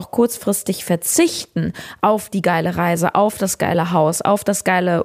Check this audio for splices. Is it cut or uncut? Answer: uncut